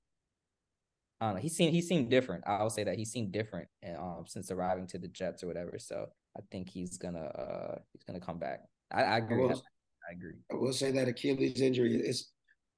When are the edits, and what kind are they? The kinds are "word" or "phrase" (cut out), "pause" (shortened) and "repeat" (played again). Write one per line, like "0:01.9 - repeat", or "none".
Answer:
0:06.1 - pause
0:07.9 - pause
0:08.8 - pause

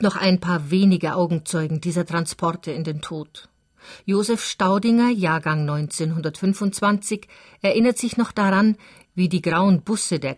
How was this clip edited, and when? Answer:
none

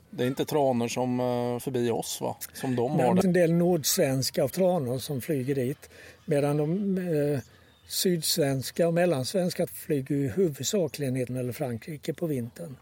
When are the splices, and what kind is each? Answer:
0:01.6 - word
0:03.2 - word
0:04.5 - word
0:05.0 - word
0:09.7 - word
0:11.3 - word

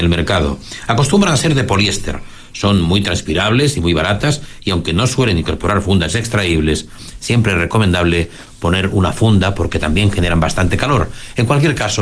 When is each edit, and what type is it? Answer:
none

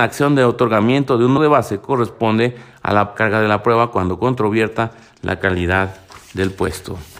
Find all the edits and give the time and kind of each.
0:01.4 - word
0:03.2 - phrase

